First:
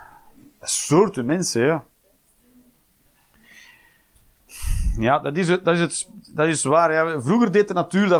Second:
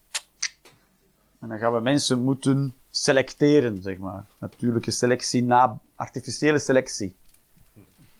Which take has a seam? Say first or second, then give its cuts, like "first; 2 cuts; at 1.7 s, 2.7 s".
second; 1 cut; at 2.8 s